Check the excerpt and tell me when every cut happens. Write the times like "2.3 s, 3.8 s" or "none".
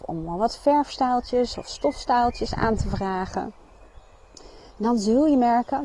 none